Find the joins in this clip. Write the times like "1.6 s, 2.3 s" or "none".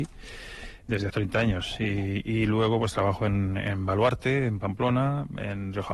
1.1 s